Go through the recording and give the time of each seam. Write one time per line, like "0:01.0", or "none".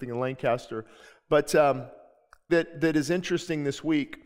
0:02.5